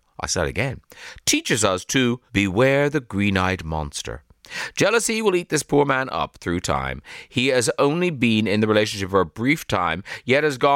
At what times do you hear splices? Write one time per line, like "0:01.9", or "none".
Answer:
0:02.3